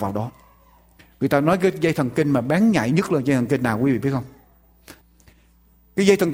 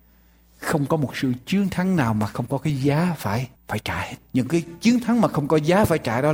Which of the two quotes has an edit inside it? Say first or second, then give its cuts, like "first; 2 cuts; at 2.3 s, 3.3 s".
second; 2 cuts; at 3.6 s, 4.2 s